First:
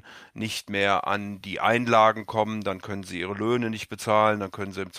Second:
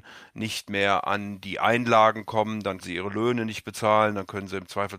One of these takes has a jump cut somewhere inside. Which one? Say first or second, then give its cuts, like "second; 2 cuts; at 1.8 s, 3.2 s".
second; 1 cut; at 2.8 s